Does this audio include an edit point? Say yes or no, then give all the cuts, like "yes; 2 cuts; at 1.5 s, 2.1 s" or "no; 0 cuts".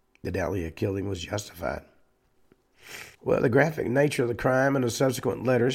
yes; 1 cut; at 3.1 s